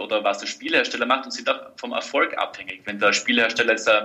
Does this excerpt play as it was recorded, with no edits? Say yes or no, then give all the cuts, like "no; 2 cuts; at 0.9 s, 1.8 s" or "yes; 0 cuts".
yes; 0 cuts